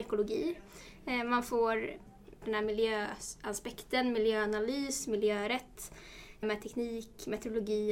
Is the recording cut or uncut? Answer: cut